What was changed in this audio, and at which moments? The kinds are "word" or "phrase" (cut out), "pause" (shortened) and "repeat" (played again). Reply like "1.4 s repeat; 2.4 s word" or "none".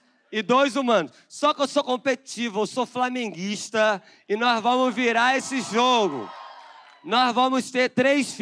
none